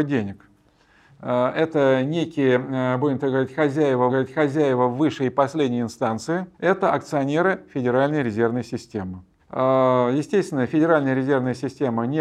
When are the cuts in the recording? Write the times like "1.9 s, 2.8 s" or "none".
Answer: 4.1 s, 6.5 s, 9.4 s